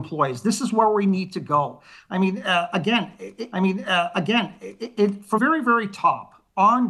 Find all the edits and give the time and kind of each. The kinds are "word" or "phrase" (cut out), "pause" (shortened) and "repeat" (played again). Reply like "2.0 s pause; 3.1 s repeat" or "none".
3.5 s repeat; 5.4 s word